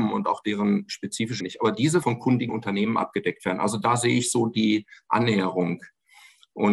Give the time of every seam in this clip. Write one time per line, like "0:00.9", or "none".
0:01.4
0:02.0
0:02.5